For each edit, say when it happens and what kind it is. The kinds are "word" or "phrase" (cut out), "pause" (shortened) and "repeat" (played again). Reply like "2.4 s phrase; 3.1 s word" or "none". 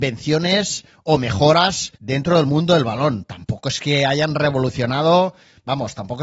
2.0 s pause